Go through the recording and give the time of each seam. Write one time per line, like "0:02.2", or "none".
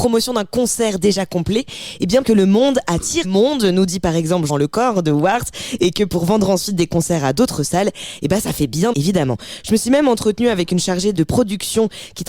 0:02.2
0:03.2
0:04.5
0:08.9
0:11.1